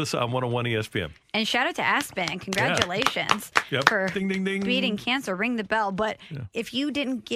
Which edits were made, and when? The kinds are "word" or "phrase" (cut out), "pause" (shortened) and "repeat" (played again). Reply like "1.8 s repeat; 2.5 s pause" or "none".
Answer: none